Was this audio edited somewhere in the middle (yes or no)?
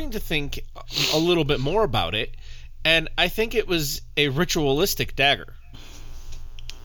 no